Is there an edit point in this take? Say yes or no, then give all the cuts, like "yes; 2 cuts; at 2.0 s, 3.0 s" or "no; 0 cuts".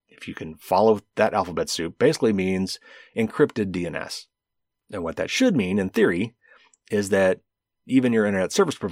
no; 0 cuts